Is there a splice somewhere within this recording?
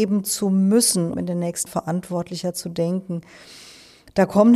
yes; 2 cuts; at 1.1 s, 1.7 s

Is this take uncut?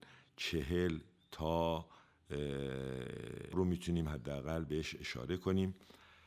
no; 1 cut; at 3.5 s

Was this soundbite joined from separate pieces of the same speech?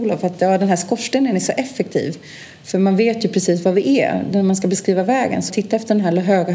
yes; 1 cut; at 5.5 s

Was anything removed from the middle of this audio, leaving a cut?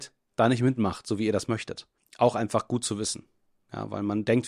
no; 0 cuts

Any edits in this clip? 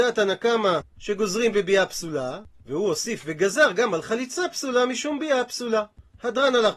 no; 0 cuts

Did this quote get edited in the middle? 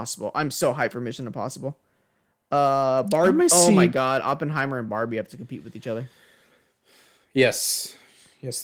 no; 0 cuts

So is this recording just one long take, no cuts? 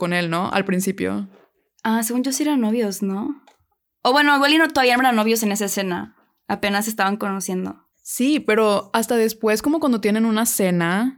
no; 1 cut; at 7.9 s

